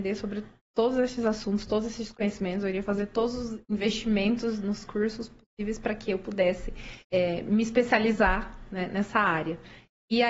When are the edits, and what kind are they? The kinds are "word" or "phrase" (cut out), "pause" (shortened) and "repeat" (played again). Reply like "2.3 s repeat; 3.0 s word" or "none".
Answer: 7.0 s pause